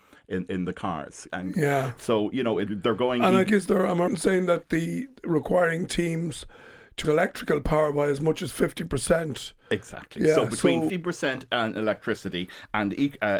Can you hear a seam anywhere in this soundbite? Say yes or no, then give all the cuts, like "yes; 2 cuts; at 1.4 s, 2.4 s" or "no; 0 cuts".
yes; 5 cuts; at 2.7 s, 3.5 s, 4.1 s, 7.0 s, 10.9 s